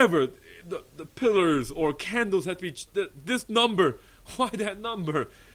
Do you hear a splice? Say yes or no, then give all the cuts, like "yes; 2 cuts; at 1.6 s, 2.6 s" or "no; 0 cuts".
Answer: no; 0 cuts